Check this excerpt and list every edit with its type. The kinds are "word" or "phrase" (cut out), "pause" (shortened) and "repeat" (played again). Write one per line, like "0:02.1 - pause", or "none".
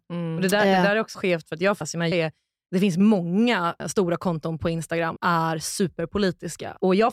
0:01.1 - word
0:01.8 - phrase
0:02.1 - word
0:03.8 - word
0:05.2 - word